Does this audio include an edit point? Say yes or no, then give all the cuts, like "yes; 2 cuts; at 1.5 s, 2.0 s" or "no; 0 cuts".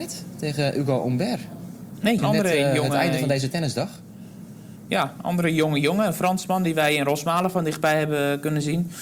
yes; 1 cut; at 2.2 s